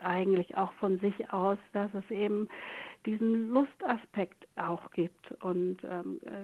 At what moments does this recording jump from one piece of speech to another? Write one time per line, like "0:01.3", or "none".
none